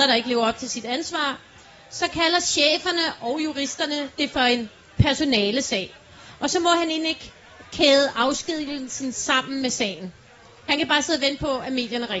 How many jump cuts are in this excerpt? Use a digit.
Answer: 0